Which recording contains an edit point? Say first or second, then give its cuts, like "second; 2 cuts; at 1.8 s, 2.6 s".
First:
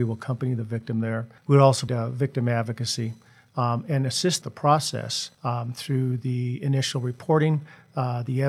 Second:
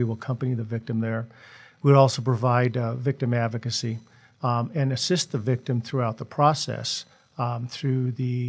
first; 4 cuts; at 1.4 s, 1.9 s, 4.4 s, 5.3 s